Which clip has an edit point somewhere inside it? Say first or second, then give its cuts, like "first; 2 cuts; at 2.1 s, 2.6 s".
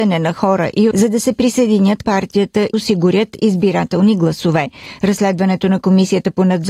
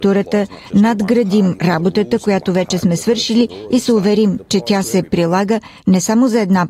first; 3 cuts; at 0.9 s, 2.0 s, 2.7 s